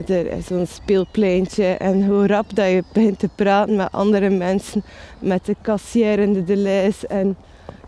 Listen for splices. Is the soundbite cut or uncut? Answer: uncut